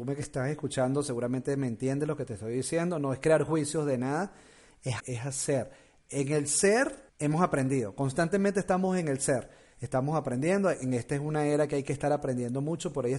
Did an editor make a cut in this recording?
yes; 2 cuts; at 5.0 s, 7.1 s

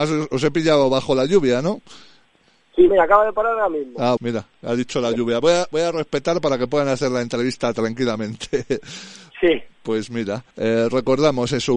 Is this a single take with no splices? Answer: no; 3 cuts; at 2.9 s, 4.2 s, 10.5 s

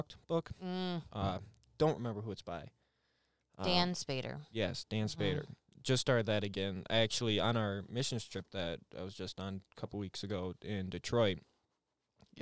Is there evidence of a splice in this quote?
no; 0 cuts

